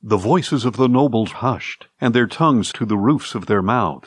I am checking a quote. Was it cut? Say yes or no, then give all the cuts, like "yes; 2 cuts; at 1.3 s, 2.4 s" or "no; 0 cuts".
yes; 3 cuts; at 1.3 s, 1.9 s, 2.7 s